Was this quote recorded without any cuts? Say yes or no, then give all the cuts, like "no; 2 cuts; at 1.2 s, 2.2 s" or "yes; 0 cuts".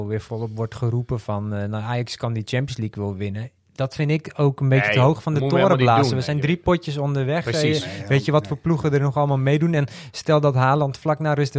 yes; 0 cuts